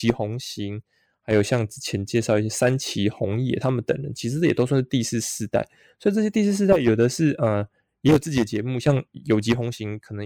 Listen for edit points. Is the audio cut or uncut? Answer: uncut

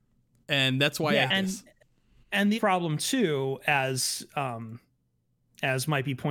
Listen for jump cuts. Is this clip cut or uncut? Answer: cut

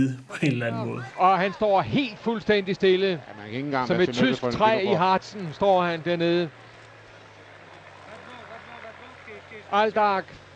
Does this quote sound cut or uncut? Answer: uncut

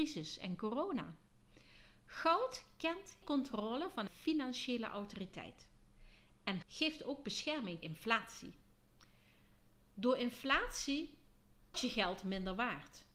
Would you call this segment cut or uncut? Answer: cut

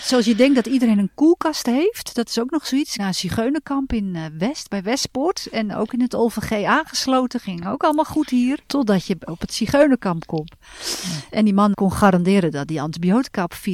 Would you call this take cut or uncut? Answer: cut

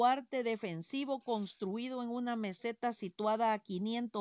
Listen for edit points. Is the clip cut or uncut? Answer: uncut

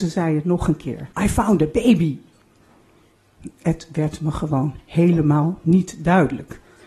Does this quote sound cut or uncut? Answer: cut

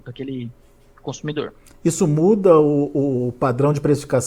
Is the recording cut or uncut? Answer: uncut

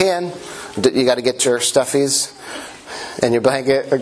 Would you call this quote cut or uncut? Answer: uncut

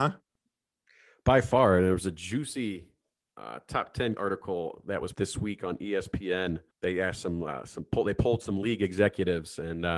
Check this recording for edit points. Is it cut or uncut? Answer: cut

